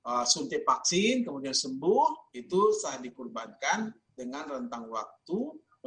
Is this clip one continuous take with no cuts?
yes; 0 cuts

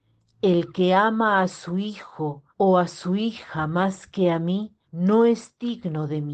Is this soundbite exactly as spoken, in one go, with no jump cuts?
no; 2 cuts; at 2.5 s, 4.8 s

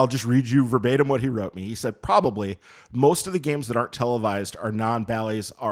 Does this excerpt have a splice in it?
no; 0 cuts

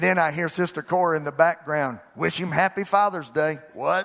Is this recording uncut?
yes; 0 cuts

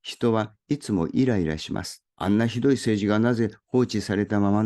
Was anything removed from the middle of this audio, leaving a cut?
yes; 1 cut; at 2.1 s

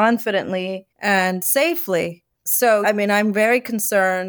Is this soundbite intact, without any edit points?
no; 2 cuts; at 0.9 s, 2.8 s

